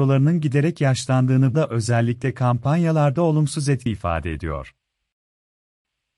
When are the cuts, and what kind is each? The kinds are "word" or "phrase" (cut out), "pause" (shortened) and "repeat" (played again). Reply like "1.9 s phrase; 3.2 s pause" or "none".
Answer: 1.5 s word; 3.9 s word